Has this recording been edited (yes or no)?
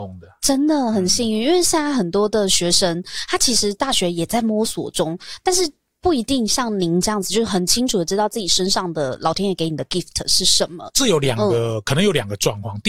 no